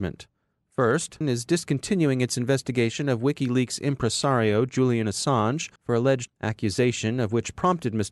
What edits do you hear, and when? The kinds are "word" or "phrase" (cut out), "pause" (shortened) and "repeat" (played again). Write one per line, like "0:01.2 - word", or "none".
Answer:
0:01.2 - word
0:05.8 - pause
0:06.3 - phrase

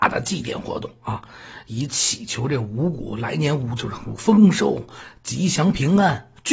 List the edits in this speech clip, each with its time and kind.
none

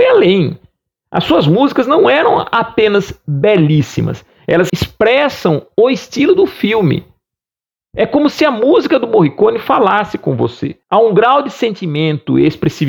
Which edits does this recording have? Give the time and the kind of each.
0:04.7 - word
0:10.8 - pause

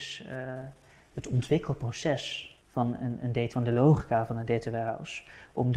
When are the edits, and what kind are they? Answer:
0:02.6 - pause
0:03.5 - word

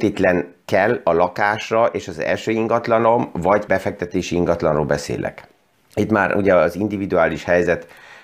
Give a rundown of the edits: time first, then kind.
0:03.7 - word
0:05.7 - pause

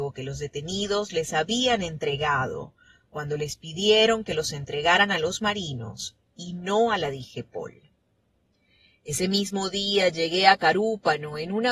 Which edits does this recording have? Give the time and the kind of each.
none

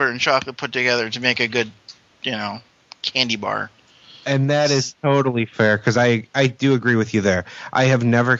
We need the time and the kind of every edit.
none

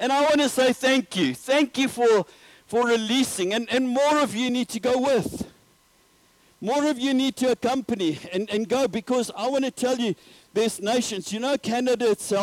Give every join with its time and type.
none

